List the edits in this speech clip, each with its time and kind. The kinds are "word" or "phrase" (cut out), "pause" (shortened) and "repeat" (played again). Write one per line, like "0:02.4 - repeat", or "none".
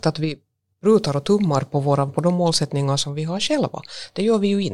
0:02.1 - word

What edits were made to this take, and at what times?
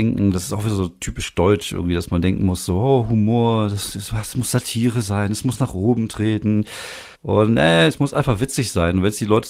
0:07.1 - pause

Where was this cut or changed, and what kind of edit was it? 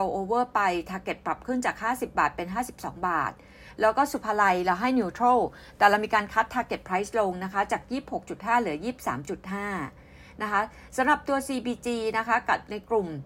none

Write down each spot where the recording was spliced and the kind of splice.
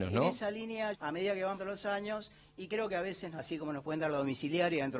0:00.9 - word
0:01.6 - word
0:03.4 - word

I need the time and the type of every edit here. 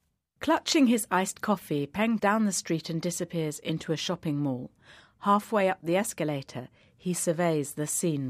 0:02.2 - phrase

